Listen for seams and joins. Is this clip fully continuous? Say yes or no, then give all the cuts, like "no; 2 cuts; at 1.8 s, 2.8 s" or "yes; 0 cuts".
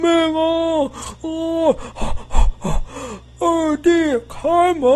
yes; 0 cuts